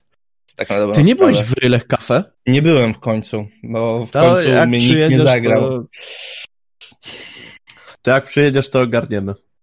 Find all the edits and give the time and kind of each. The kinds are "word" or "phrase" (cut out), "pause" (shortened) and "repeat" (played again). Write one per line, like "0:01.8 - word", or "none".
0:02.3 - pause
0:08.0 - pause